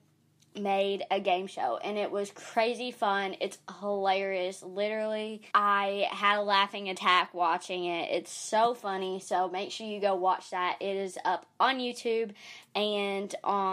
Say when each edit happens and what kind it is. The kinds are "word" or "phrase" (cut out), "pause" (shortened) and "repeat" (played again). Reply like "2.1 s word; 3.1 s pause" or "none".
5.5 s pause